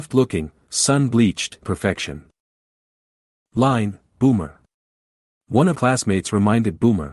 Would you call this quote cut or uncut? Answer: cut